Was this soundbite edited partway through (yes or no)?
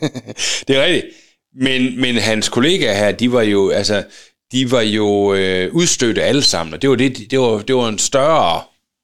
no